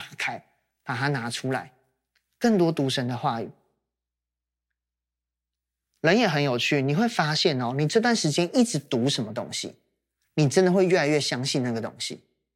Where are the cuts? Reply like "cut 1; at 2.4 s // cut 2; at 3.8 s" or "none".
none